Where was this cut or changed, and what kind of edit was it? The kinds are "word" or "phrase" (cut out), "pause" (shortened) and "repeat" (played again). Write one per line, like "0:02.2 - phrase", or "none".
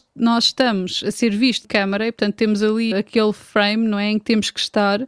0:01.6 - word
0:02.9 - word